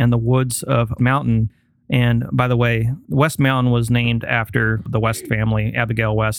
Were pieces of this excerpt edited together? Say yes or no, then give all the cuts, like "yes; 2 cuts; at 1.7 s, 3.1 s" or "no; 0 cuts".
yes; 1 cut; at 1.0 s